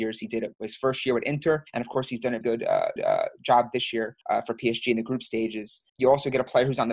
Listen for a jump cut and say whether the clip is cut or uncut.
cut